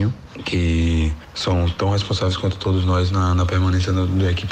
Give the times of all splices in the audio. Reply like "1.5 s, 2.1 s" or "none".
none

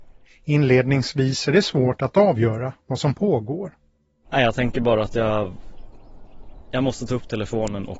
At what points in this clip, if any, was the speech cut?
none

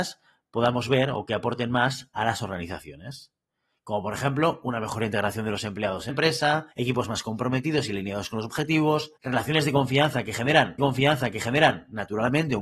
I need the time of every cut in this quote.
6.1 s, 6.7 s, 9.2 s, 10.8 s

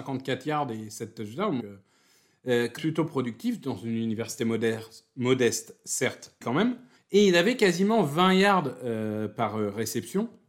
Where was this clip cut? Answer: 1.6 s, 2.8 s, 6.4 s, 7.0 s

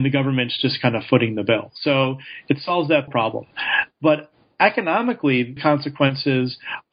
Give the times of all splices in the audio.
3.1 s, 5.6 s

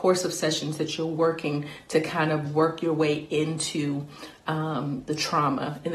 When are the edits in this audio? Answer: none

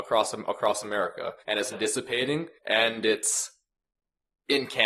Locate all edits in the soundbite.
1.4 s, 1.7 s, 2.6 s

